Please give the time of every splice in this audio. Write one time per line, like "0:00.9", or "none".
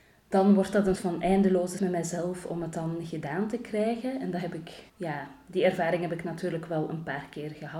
0:00.9
0:01.8
0:04.9